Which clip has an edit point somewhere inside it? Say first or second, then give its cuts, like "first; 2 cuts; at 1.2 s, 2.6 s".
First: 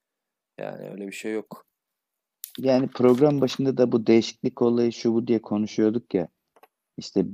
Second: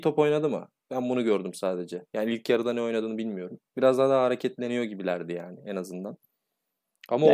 second; 1 cut; at 3.7 s